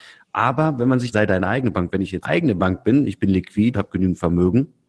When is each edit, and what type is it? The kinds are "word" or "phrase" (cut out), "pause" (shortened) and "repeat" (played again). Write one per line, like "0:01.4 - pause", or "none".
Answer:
0:01.1 - phrase
0:02.2 - word
0:03.7 - word

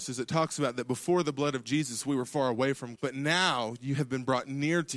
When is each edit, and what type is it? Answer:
0:03.0 - word

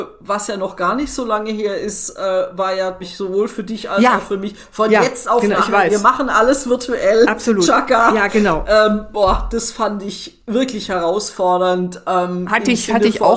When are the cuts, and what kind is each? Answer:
0:03.0 - word

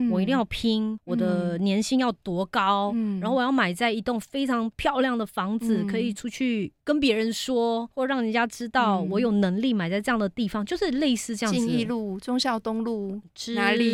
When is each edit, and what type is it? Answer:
0:06.8 - pause
0:07.9 - pause

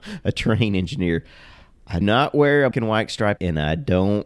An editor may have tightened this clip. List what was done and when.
0:02.0 - word
0:02.7 - word
0:03.4 - word

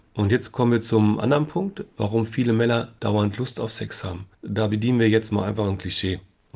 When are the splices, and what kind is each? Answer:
0:01.9 - pause
0:03.0 - pause
0:04.3 - pause

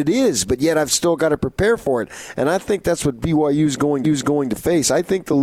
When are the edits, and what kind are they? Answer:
0:04.0 - repeat

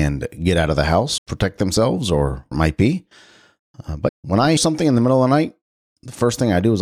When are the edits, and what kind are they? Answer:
0:01.2 - word
0:02.5 - word
0:04.1 - word
0:04.6 - word

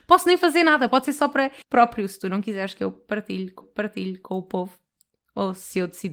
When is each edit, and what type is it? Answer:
0:01.6 - word
0:03.6 - repeat

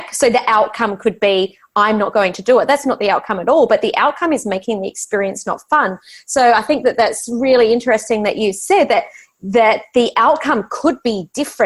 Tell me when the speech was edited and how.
none

